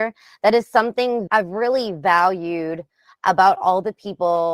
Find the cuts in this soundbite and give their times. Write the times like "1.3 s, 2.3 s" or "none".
1.3 s